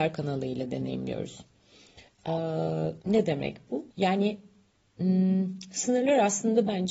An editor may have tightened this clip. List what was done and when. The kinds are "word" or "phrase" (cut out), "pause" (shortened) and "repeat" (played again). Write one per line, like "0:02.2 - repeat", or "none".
0:03.0 - pause
0:03.9 - pause